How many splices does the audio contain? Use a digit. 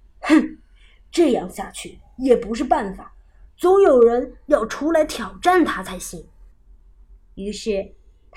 1